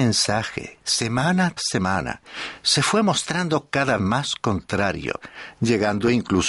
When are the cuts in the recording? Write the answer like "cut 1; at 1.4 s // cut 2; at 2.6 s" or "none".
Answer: cut 1; at 1.6 s // cut 2; at 4.0 s